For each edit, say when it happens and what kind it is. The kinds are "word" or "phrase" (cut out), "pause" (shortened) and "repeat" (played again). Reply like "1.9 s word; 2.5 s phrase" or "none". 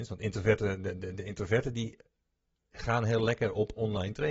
none